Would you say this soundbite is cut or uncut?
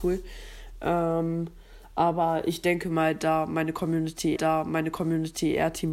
cut